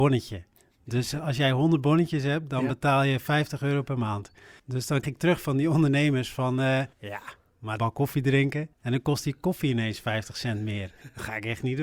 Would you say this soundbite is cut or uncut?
cut